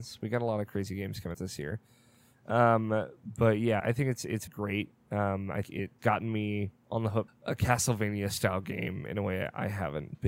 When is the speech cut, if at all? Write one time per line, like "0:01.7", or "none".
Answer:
0:01.3
0:03.8
0:04.5
0:05.6
0:06.0
0:07.3